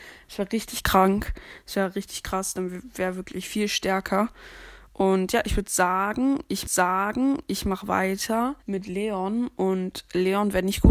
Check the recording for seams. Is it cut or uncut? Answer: cut